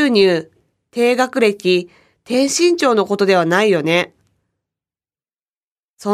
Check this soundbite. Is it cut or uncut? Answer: uncut